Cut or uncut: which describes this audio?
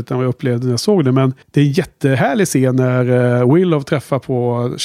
cut